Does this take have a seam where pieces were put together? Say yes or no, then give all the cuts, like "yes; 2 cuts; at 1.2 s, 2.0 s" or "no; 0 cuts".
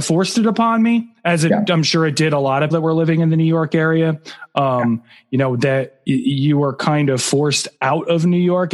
yes; 2 cuts; at 2.7 s, 7.8 s